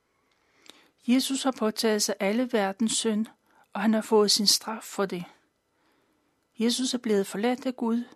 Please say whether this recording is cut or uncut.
uncut